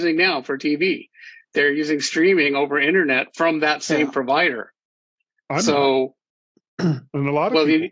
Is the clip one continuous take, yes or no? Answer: yes